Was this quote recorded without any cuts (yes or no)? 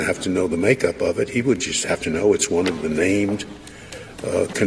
yes